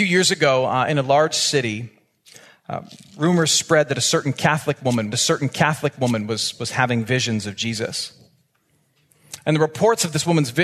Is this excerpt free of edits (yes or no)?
no